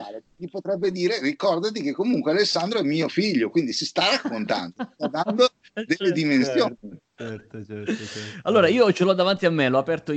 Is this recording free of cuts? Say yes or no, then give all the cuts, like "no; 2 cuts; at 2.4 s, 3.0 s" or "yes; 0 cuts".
yes; 0 cuts